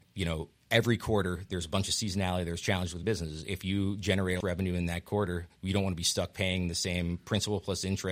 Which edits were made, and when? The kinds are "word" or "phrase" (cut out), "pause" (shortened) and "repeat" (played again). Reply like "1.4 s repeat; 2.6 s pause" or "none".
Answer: 4.4 s phrase